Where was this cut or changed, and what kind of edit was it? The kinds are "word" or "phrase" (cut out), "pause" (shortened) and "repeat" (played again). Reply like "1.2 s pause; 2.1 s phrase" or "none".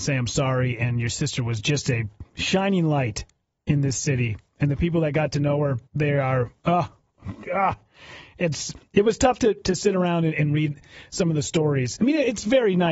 5.9 s pause